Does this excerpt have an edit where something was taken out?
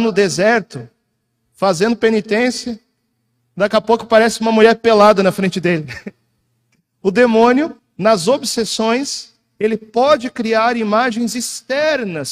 yes; 1 cut; at 7.8 s

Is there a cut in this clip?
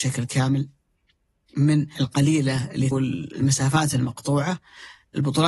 yes; 2 cuts; at 2.0 s, 2.9 s

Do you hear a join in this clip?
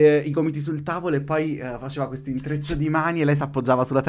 no; 0 cuts

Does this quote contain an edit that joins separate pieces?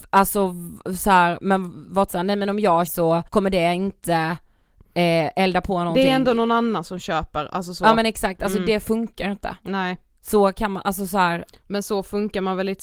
yes; 3 cuts; at 2.1 s, 2.9 s, 3.3 s

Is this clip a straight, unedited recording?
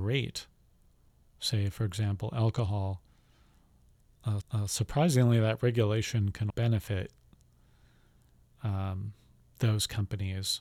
no; 2 cuts; at 4.4 s, 6.5 s

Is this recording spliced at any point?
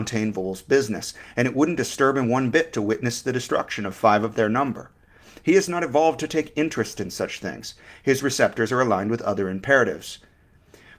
no; 0 cuts

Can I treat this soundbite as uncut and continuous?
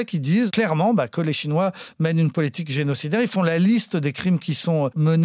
yes; 0 cuts

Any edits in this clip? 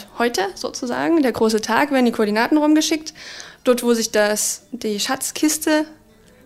no; 0 cuts

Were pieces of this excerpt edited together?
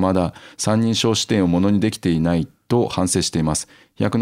no; 0 cuts

